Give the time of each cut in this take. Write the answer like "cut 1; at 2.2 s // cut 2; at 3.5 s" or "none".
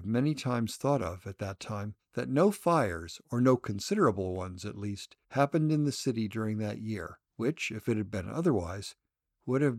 cut 1; at 2.0 s // cut 2; at 5.2 s // cut 3; at 7.2 s